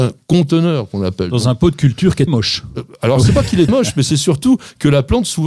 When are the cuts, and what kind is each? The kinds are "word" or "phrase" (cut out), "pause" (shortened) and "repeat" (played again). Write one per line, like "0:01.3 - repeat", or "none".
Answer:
0:02.3 - word
0:03.7 - word